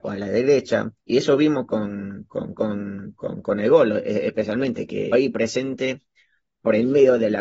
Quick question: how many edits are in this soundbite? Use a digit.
3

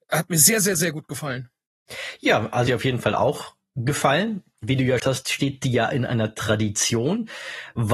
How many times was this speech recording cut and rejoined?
2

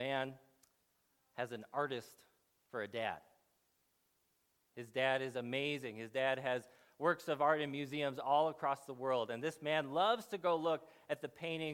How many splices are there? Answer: 0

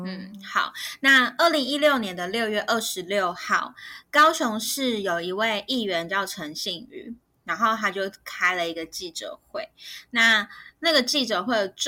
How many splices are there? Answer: 0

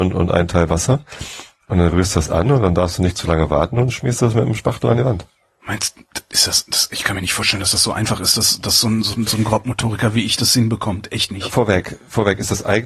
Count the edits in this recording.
0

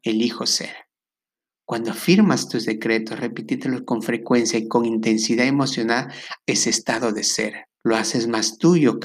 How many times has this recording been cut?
2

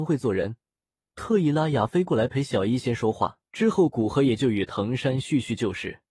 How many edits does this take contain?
1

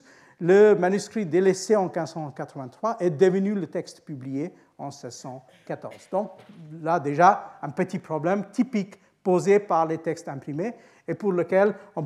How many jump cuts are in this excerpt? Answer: 0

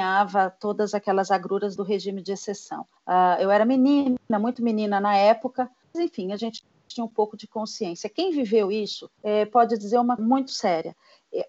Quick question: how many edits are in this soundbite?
5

